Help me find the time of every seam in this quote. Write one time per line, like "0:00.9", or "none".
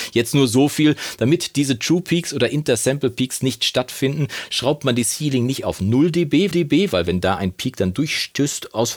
0:06.5